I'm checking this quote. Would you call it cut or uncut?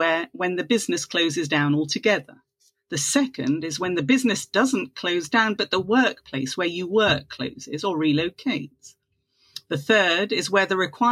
uncut